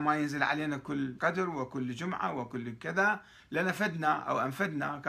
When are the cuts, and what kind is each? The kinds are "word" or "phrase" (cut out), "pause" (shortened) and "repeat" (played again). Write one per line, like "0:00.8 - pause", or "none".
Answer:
0:01.2 - word

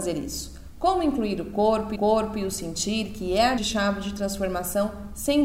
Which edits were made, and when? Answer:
0:02.0 - repeat
0:03.6 - word

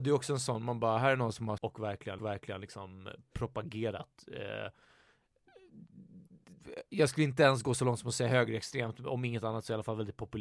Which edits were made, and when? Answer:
0:01.6 - word
0:02.2 - repeat

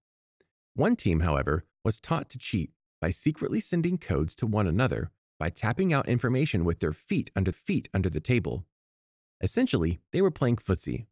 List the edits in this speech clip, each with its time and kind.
0:07.5 - repeat

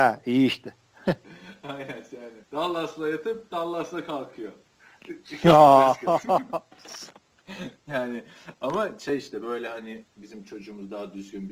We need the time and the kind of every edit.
0:02.4 - pause
0:10.1 - pause

